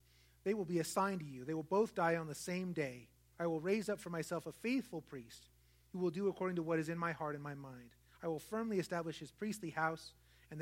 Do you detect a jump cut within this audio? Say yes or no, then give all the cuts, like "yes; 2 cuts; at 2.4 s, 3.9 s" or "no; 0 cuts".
no; 0 cuts